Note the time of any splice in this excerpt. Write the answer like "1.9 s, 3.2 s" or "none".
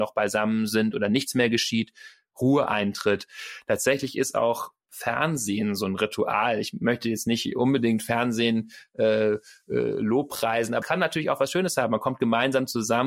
10.8 s